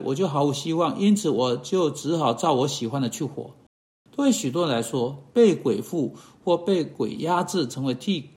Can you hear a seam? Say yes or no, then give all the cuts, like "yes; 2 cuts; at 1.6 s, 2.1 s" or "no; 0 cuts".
no; 0 cuts